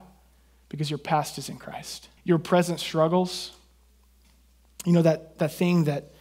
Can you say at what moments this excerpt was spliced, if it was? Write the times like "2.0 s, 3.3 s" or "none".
2.2 s

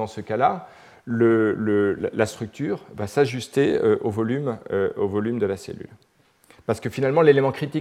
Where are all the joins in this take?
none

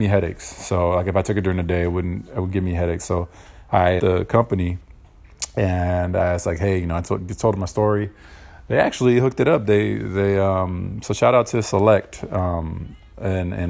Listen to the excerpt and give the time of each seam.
4.0 s

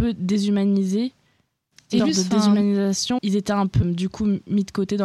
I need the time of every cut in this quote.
2.0 s, 3.2 s, 3.8 s

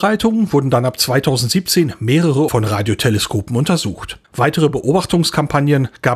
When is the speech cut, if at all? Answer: 2.5 s, 4.2 s

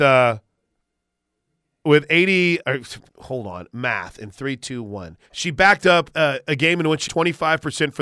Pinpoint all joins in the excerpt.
2.6 s, 3.1 s, 5.2 s, 7.1 s

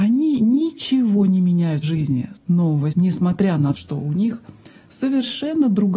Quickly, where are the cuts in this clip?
1.8 s, 2.4 s, 2.9 s, 3.7 s

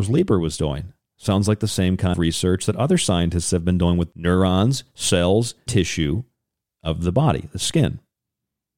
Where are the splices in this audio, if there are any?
2.1 s, 4.1 s, 5.7 s

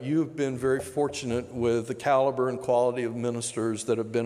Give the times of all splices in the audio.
none

